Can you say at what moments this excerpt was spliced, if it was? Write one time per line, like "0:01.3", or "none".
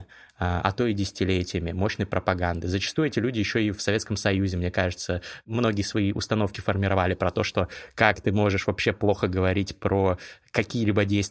none